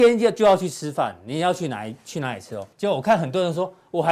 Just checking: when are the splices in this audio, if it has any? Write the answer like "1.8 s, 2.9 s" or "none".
2.7 s